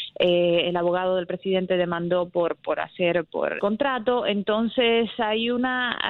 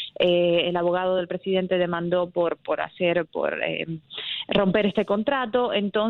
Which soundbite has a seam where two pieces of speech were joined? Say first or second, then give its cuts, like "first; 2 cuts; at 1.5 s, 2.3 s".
first; 1 cut; at 3.6 s